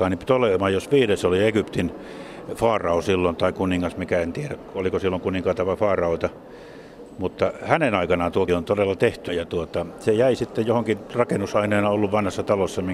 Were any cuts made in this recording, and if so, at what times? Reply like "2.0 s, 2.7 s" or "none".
8.5 s, 9.3 s